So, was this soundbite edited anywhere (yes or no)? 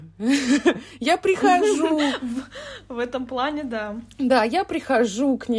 no